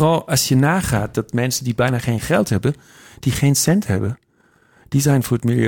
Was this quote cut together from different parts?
no; 0 cuts

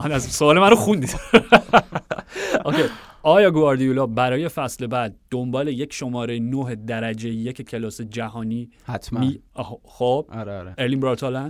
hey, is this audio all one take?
yes; 0 cuts

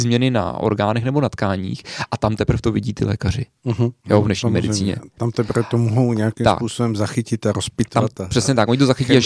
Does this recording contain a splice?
no; 0 cuts

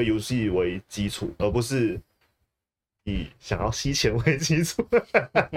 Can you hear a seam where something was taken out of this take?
yes; 1 cut; at 1.4 s

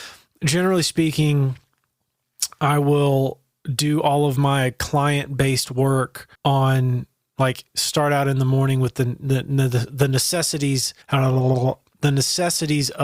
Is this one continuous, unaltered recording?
no; 2 cuts; at 6.4 s, 11.0 s

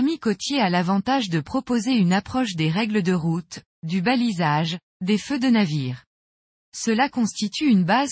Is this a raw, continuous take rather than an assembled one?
yes; 0 cuts

